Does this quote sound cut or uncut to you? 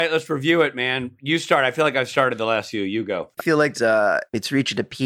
cut